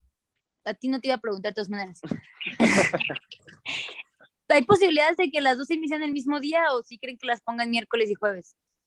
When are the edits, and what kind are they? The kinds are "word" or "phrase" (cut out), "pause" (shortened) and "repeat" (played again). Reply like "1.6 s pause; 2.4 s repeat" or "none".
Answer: none